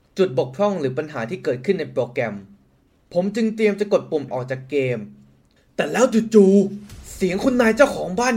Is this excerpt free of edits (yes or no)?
no